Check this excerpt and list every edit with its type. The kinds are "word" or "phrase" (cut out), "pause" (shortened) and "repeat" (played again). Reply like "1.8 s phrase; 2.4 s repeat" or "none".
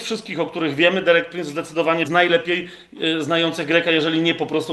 2.0 s phrase